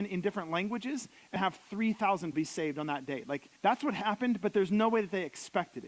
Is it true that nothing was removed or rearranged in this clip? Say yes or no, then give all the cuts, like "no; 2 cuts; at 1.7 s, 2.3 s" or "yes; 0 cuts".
no; 3 cuts; at 1.4 s, 2.3 s, 3.6 s